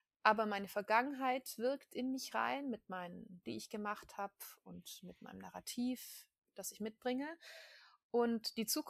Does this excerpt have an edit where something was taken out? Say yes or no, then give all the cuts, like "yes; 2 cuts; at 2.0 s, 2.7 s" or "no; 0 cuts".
yes; 1 cut; at 3.4 s